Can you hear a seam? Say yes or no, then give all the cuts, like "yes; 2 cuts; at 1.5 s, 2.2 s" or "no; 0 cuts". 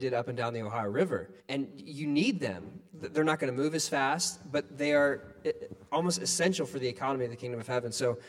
yes; 1 cut; at 1.4 s